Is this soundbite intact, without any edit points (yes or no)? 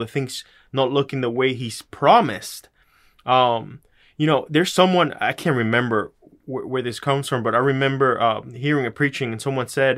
yes